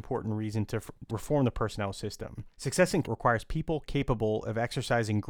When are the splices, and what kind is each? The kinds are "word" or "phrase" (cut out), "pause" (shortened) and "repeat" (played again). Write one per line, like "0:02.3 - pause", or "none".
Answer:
0:01.1 - word
0:02.5 - pause
0:03.0 - word